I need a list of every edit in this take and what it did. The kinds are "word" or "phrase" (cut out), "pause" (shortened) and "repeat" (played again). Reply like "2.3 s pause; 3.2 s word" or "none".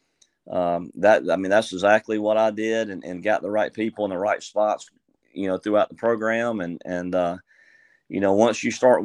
none